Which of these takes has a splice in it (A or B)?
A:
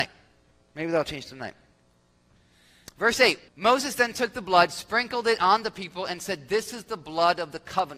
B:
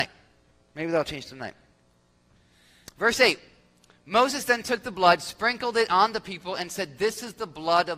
A